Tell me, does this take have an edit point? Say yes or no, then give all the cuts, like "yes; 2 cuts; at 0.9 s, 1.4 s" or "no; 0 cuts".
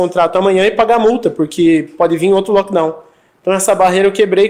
no; 0 cuts